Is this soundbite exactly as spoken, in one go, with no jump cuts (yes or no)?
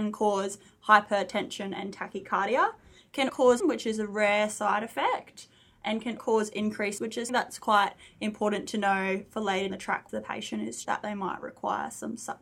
no